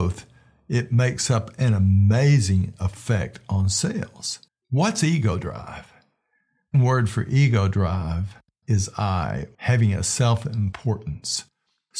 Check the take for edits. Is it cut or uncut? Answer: cut